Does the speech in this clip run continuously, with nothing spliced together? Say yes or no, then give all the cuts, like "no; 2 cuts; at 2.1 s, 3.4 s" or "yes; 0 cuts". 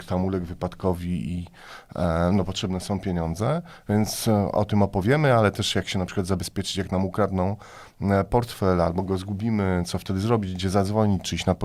yes; 0 cuts